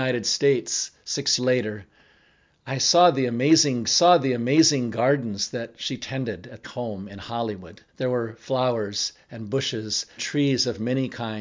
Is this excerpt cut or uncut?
cut